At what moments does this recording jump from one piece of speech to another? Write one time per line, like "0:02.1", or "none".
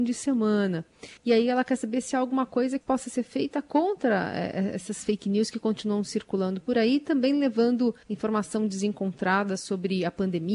0:01.2
0:02.8
0:08.0